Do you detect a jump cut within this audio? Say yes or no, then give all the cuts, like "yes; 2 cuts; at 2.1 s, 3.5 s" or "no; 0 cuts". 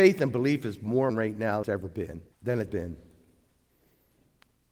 yes; 4 cuts; at 1.1 s, 1.6 s, 2.3 s, 2.7 s